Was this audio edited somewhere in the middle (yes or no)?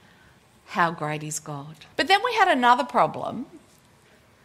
yes